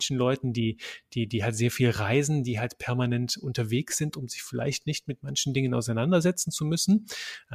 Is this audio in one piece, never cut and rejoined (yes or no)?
yes